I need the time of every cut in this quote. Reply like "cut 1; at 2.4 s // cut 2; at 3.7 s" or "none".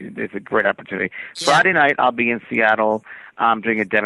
none